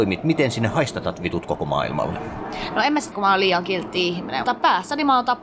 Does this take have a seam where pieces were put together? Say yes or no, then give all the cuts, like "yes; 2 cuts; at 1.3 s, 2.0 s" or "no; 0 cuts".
yes; 2 cuts; at 3.1 s, 4.4 s